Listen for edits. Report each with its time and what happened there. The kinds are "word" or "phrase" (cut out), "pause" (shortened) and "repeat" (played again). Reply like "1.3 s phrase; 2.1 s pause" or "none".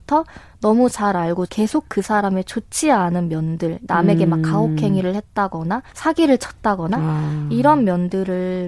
1.5 s word; 5.9 s pause

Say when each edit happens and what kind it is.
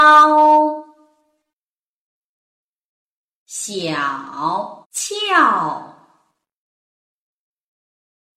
4.8 s pause

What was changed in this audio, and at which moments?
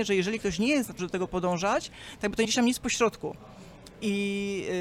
1.0 s word; 2.4 s word

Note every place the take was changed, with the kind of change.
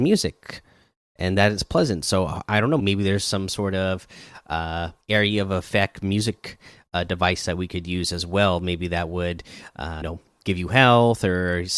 2.8 s word; 5.0 s pause; 10.0 s word

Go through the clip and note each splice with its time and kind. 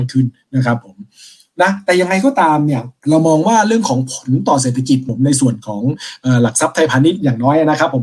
3.0 s pause

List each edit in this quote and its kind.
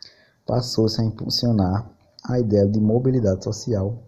none

